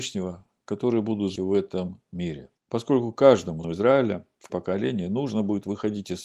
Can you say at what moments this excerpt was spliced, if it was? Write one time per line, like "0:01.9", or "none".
0:01.4
0:02.6
0:03.6
0:04.5